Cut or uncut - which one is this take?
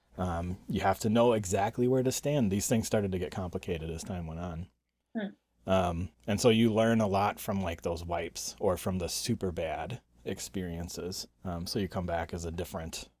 cut